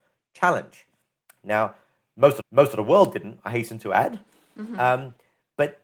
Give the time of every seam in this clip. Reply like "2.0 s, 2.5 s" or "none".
2.4 s